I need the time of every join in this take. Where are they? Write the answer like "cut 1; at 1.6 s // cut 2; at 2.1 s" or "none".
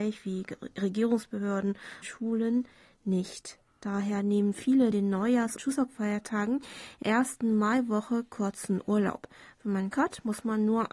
cut 1; at 2.0 s // cut 2; at 4.9 s // cut 3; at 5.6 s // cut 4; at 7.0 s // cut 5; at 9.9 s